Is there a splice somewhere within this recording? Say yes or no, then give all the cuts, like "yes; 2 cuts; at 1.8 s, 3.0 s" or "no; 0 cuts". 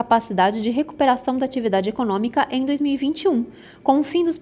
no; 0 cuts